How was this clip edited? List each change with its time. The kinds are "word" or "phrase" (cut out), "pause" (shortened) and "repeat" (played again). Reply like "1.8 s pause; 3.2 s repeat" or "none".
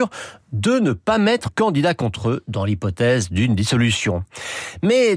1.5 s word